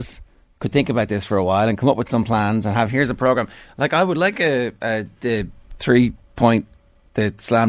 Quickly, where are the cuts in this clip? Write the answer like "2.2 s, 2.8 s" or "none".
none